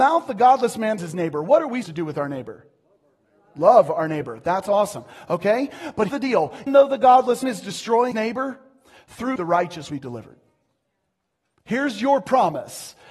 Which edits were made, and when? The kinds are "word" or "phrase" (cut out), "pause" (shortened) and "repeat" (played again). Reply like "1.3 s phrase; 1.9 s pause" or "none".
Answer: 1.0 s word; 1.8 s word; 6.1 s word; 6.7 s word; 7.4 s word; 8.1 s word; 9.4 s word; 9.9 s word

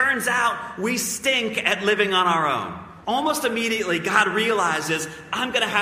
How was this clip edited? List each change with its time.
3.0 s pause

